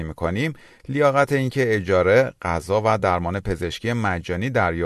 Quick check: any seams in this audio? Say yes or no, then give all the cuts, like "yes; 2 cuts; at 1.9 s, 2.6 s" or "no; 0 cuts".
no; 0 cuts